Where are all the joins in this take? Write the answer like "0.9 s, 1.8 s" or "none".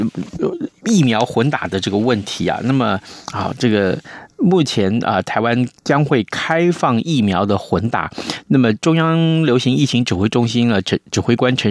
5.8 s